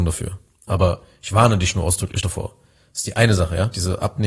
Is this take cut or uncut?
uncut